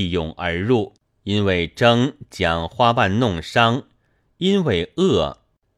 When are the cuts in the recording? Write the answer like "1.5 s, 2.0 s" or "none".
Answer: 1.1 s